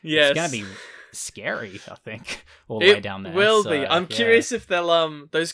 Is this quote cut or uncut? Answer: cut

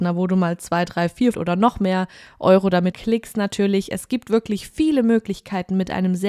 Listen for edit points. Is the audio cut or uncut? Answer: cut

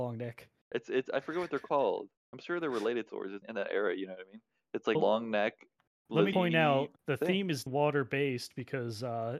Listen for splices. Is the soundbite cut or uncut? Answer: cut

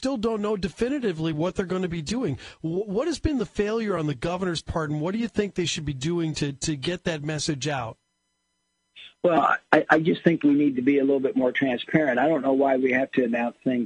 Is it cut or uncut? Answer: uncut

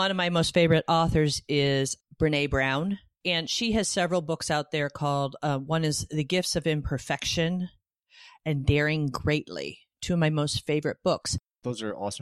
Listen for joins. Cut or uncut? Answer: uncut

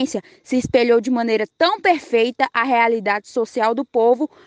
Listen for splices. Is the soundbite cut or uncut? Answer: uncut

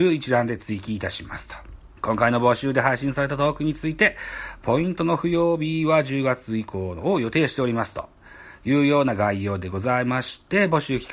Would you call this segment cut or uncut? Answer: cut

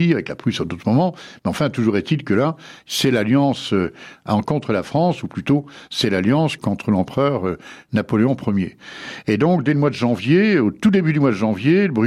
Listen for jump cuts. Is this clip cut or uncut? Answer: cut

